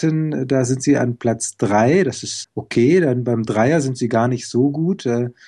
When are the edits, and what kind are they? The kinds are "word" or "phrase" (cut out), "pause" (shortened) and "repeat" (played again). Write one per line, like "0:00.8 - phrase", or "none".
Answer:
0:02.4 - word